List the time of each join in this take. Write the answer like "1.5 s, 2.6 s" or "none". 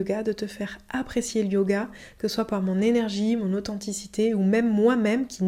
none